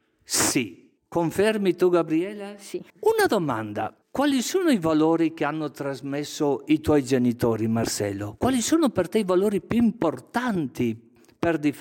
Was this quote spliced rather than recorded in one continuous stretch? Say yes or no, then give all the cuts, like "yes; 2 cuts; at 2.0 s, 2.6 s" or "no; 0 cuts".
yes; 3 cuts; at 1.0 s, 2.9 s, 4.0 s